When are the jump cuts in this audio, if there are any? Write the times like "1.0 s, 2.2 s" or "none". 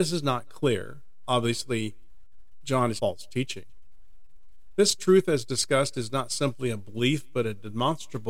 3.0 s